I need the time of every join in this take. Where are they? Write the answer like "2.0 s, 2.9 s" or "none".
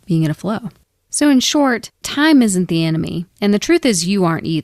1.9 s, 3.3 s